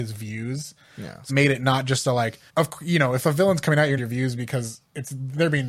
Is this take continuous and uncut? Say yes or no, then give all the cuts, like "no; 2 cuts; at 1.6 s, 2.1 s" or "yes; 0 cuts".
no; 3 cuts; at 1.3 s, 2.5 s, 4.0 s